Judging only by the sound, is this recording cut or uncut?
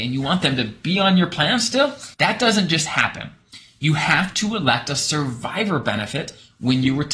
cut